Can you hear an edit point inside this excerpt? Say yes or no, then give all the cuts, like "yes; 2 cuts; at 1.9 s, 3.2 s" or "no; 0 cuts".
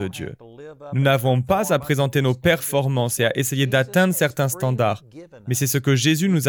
no; 0 cuts